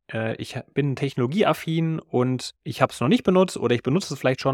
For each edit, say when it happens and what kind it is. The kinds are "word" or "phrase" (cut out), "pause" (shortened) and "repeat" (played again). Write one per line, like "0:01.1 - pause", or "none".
0:02.6 - pause